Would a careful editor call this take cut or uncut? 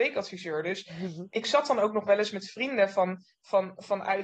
uncut